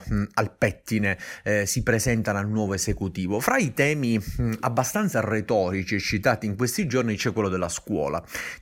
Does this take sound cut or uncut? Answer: uncut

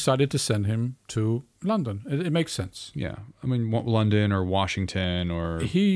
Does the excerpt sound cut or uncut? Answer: cut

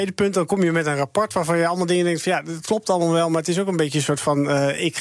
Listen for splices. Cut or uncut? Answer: uncut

